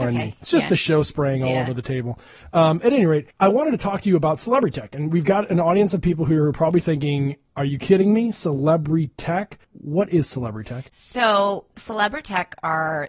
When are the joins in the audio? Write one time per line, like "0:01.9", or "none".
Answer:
0:03.3
0:09.6
0:10.9